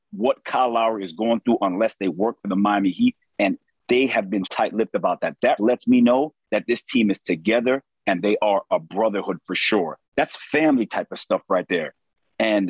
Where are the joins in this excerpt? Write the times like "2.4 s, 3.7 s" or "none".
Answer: 4.4 s, 5.6 s, 10.0 s

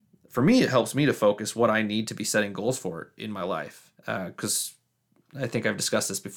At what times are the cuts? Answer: 4.0 s

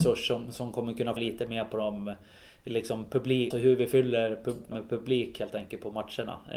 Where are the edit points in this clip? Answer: 1.2 s, 3.5 s, 4.7 s

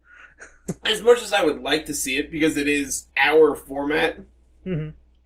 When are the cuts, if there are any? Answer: 3.1 s

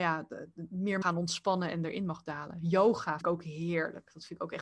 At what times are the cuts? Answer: 1.0 s, 3.2 s

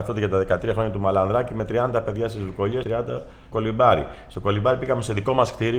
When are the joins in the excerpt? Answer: 2.8 s, 3.5 s

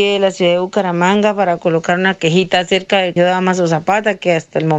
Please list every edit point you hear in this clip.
3.2 s

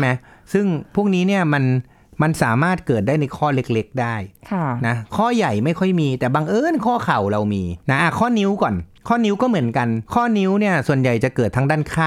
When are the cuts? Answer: 7.8 s, 9.0 s, 10.1 s

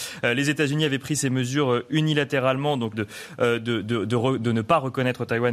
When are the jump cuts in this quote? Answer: 2.9 s

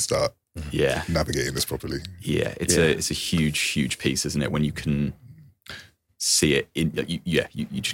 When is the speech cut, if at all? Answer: none

